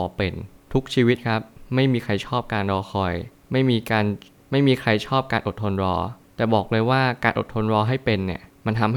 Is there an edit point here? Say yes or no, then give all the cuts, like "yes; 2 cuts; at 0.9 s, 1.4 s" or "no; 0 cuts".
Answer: no; 0 cuts